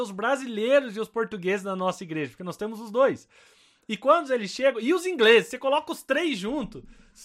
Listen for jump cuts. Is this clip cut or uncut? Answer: uncut